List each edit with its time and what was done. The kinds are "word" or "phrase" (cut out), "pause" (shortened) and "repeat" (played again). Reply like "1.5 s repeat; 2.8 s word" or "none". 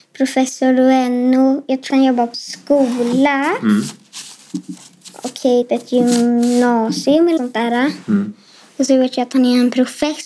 1.9 s word; 2.3 s word; 5.6 s word; 7.4 s word